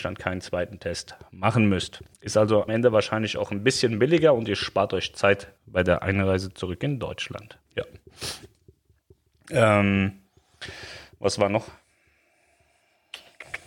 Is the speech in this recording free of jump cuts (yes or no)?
no